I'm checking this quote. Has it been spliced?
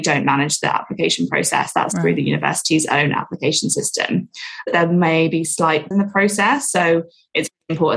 yes; 1 cut; at 5.9 s

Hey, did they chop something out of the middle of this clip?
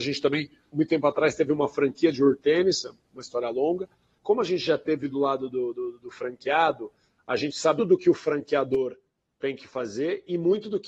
yes; 1 cut; at 7.8 s

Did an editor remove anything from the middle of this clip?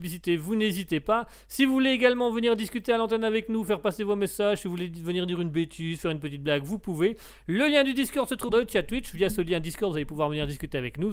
yes; 1 cut; at 8.5 s

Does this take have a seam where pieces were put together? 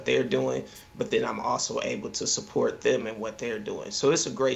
no; 0 cuts

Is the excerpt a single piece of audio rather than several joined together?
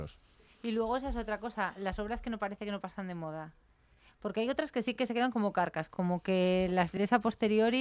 yes; 0 cuts

